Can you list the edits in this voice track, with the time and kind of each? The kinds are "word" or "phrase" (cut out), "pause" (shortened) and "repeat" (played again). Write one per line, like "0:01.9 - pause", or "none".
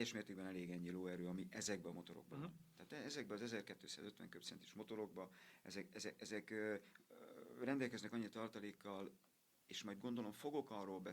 none